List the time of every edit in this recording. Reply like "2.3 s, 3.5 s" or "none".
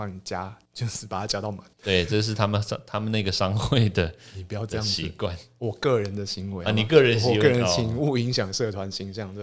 1.7 s